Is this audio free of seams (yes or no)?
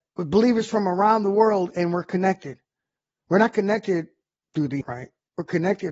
no